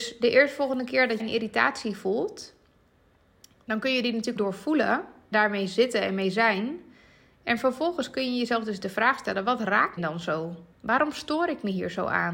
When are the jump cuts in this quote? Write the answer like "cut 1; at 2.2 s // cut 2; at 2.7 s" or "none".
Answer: cut 1; at 1.2 s // cut 2; at 4.4 s // cut 3; at 5.3 s // cut 4; at 10.0 s // cut 5; at 10.7 s